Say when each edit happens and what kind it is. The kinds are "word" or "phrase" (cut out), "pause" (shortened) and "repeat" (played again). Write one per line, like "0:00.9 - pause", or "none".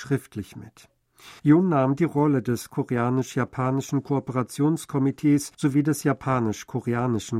0:01.4 - pause
0:05.5 - pause